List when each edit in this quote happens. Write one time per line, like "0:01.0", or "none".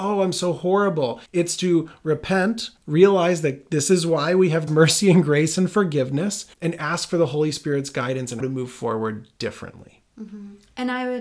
0:01.3
0:02.8
0:04.7
0:06.5
0:08.4